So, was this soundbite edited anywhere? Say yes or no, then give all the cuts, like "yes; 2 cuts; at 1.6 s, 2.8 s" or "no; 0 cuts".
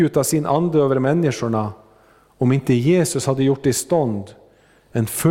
no; 0 cuts